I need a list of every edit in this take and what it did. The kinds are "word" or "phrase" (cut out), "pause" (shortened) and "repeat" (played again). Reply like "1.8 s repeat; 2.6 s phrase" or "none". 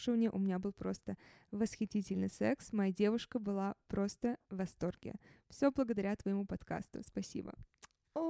none